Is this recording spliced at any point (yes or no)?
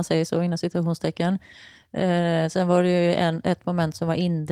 no